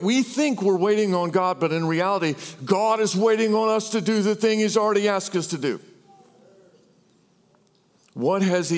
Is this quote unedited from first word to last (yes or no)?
yes